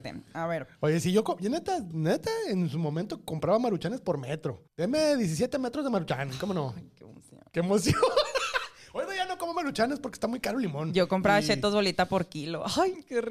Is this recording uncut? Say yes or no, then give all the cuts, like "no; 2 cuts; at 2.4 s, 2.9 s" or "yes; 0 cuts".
no; 2 cuts; at 4.7 s, 7.5 s